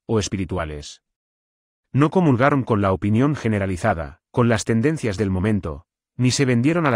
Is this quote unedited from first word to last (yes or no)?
no